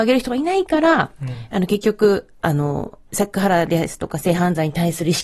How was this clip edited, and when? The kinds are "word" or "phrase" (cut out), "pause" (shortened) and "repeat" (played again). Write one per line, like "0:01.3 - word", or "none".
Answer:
0:03.0 - pause